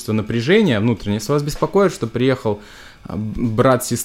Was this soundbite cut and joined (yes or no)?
no